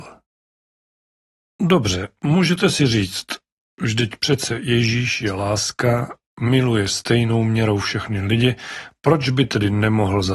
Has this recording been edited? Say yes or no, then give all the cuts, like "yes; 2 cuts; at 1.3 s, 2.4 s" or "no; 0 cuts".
no; 0 cuts